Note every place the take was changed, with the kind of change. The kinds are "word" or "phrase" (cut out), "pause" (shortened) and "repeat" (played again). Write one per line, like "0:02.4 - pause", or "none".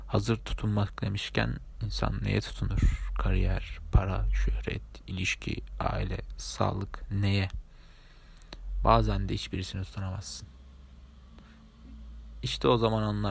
none